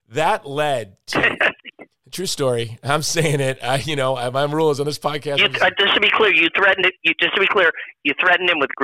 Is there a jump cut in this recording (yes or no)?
no